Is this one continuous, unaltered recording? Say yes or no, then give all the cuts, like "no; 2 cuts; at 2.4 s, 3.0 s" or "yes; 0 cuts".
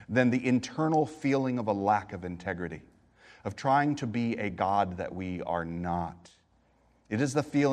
yes; 0 cuts